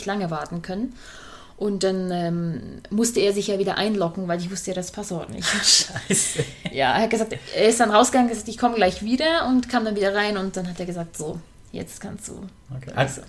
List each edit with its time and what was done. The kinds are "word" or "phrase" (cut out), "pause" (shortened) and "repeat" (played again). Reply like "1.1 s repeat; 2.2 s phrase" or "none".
none